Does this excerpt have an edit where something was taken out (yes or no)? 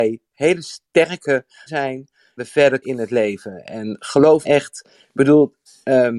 yes